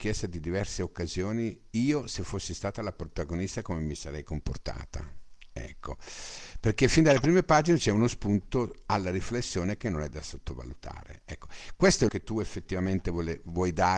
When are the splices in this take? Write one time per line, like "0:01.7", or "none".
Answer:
0:12.1